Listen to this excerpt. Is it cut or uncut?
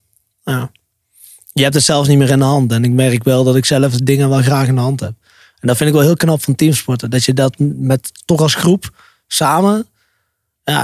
uncut